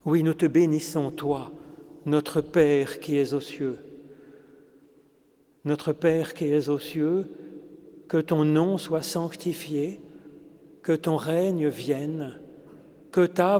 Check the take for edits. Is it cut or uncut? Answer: uncut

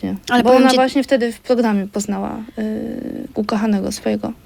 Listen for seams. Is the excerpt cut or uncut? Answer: uncut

